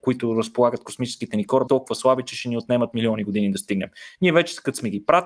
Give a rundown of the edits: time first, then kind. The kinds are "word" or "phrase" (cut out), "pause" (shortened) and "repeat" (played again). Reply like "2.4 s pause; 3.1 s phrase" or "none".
1.7 s word